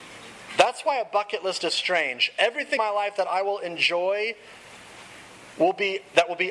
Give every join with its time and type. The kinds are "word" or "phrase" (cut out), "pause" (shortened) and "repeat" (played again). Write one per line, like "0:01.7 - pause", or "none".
0:01.7 - word
0:02.8 - word